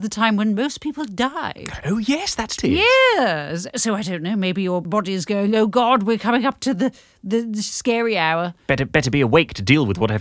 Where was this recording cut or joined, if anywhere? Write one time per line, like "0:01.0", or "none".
0:02.6
0:04.8